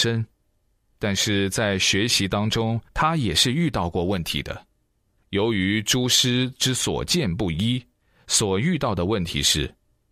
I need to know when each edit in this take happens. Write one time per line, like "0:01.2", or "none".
0:02.9